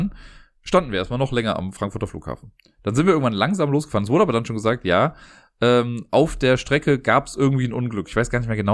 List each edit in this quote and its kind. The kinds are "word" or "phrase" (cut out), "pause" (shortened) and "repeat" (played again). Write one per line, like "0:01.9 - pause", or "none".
none